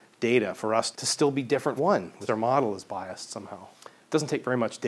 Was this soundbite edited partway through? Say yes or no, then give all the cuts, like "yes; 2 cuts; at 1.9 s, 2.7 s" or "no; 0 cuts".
yes; 4 cuts; at 0.9 s, 1.8 s, 2.3 s, 3.7 s